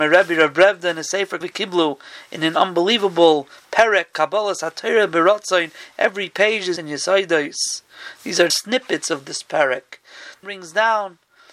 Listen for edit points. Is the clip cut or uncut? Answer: cut